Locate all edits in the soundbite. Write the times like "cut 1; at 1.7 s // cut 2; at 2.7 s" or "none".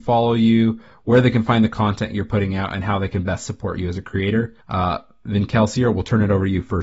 cut 1; at 4.6 s